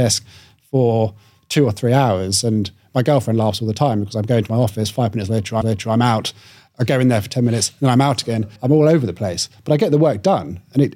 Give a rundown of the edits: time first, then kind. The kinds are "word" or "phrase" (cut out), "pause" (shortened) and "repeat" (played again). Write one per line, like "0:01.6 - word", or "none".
0:05.6 - repeat
0:08.6 - pause